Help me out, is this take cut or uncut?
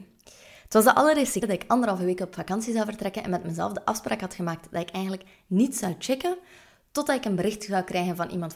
cut